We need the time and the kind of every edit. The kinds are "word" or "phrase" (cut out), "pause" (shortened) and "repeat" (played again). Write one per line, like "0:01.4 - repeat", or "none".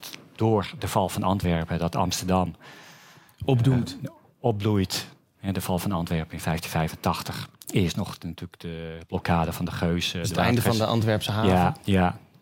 0:07.5 - pause